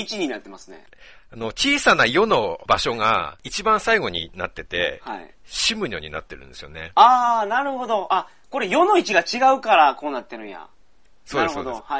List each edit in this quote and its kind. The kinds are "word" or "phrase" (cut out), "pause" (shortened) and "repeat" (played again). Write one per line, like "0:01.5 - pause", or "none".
none